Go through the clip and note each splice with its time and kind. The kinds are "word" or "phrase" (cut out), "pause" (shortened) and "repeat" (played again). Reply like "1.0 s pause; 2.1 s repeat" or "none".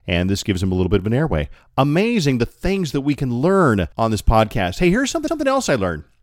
3.9 s pause; 5.3 s repeat